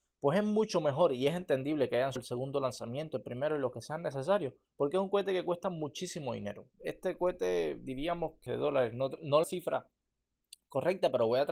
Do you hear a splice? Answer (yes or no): yes